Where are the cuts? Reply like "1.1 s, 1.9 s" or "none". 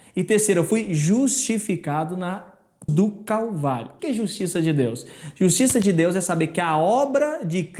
2.9 s, 4.0 s

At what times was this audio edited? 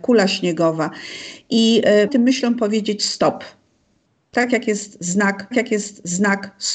2.1 s, 5.5 s

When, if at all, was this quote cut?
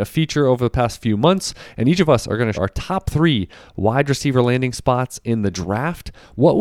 2.5 s

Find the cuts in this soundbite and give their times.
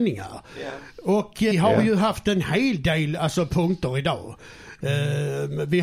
1.5 s

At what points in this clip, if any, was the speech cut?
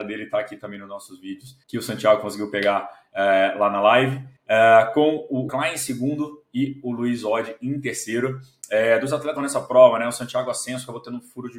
1.6 s, 4.4 s, 5.5 s, 9.4 s

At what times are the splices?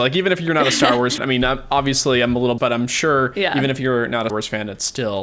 1.2 s, 2.6 s, 4.3 s

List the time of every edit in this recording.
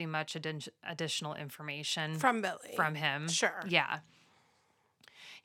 none

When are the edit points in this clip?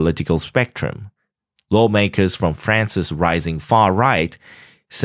none

